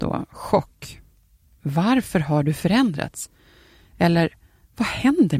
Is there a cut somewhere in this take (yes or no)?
no